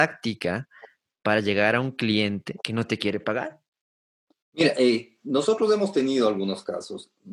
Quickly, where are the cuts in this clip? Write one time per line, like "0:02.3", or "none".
0:02.6